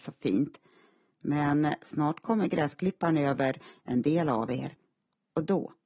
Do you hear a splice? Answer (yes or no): no